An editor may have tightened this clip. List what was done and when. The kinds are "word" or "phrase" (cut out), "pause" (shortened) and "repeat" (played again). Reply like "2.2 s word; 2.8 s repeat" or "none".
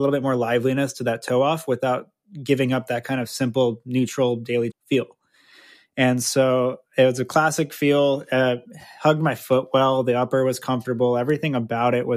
4.7 s word